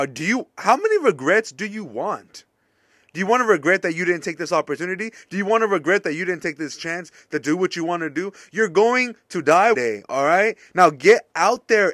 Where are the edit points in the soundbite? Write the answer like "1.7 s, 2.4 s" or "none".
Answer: 9.7 s